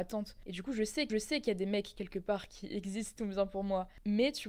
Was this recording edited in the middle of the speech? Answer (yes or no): yes